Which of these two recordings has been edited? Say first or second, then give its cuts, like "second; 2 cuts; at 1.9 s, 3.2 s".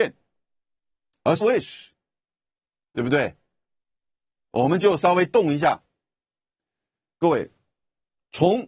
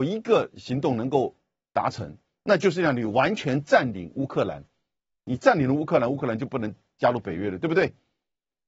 first; 1 cut; at 1.4 s